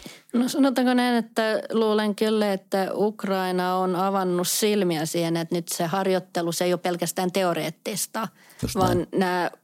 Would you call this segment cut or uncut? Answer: uncut